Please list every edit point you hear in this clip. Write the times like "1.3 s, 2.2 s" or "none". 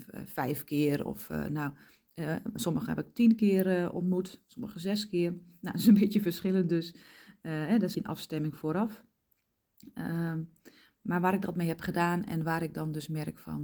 7.9 s

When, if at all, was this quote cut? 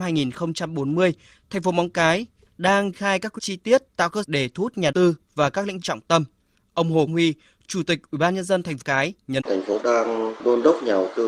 2.9 s, 3.4 s, 4.2 s, 4.9 s, 5.8 s, 7.1 s, 8.8 s, 9.4 s, 9.8 s

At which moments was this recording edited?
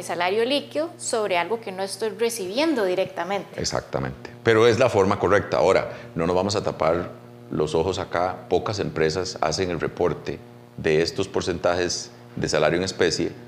none

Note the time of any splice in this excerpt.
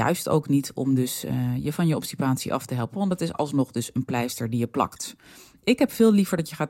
none

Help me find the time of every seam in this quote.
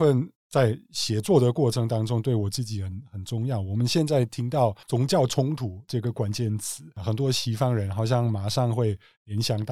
4.8 s

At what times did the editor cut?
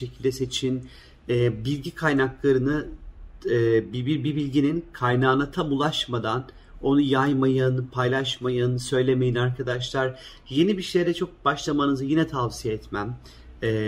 none

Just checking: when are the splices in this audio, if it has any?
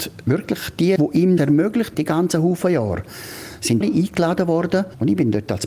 1.0 s, 1.4 s, 1.9 s, 3.8 s

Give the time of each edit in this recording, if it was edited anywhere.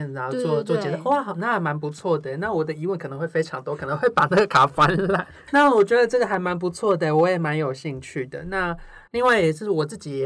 9.1 s

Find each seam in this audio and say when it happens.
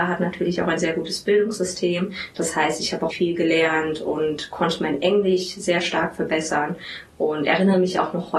3.1 s

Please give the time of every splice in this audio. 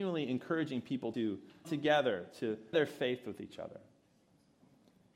1.1 s, 1.6 s, 2.7 s

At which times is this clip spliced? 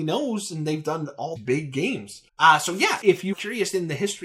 1.4 s, 2.3 s, 3.0 s, 3.3 s

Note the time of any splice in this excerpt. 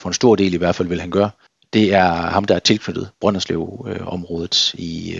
1.5 s

